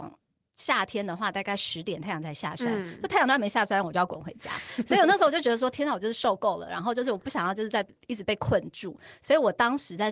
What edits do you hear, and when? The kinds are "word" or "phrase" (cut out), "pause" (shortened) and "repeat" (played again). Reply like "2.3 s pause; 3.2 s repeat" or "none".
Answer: none